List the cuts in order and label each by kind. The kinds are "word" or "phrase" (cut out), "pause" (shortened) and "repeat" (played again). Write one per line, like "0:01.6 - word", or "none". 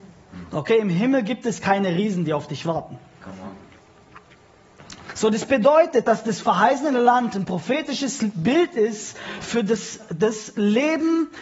none